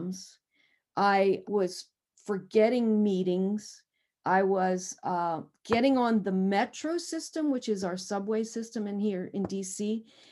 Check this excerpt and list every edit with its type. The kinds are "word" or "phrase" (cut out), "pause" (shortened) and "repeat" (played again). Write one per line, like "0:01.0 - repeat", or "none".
0:01.4 - word